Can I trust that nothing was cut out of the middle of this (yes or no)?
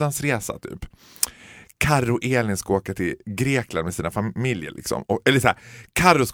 yes